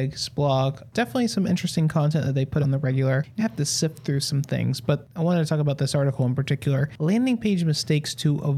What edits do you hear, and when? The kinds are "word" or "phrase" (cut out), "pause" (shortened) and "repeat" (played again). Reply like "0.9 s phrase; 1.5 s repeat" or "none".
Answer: 2.6 s word; 3.4 s word